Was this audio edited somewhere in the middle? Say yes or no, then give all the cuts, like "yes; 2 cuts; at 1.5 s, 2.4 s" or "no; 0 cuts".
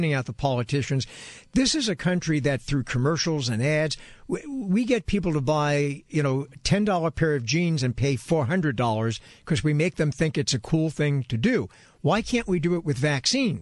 no; 0 cuts